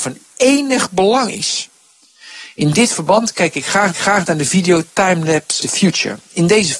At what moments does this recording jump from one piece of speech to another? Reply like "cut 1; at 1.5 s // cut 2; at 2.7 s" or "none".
cut 1; at 3.9 s // cut 2; at 5.6 s